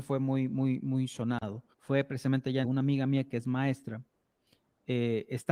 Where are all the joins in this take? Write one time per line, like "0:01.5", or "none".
0:01.7
0:02.6